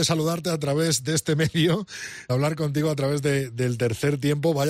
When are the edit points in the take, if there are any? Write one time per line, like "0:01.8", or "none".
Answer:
0:02.3

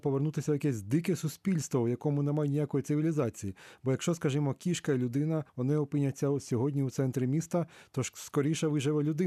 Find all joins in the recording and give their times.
0:05.5

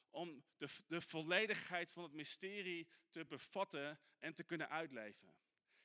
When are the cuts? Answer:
none

